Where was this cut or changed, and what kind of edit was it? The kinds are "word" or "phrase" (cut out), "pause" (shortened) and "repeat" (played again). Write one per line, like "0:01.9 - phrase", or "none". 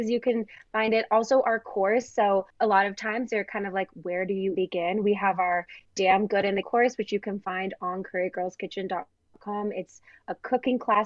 0:02.5 - pause
0:04.5 - word
0:06.6 - word